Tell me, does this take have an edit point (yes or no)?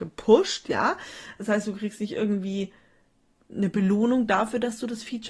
no